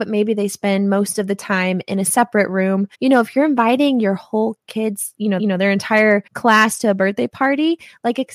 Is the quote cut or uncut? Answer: cut